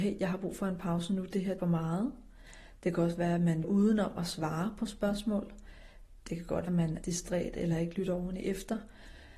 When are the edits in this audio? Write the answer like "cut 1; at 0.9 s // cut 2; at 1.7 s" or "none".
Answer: cut 1; at 1.6 s // cut 2; at 3.6 s // cut 3; at 6.7 s // cut 4; at 7.0 s